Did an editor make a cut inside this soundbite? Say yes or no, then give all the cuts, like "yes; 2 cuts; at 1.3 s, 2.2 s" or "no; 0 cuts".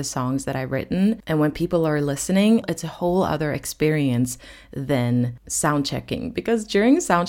no; 0 cuts